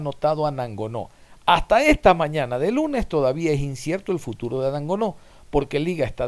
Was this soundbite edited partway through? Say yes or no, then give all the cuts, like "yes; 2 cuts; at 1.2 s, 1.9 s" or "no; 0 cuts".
no; 0 cuts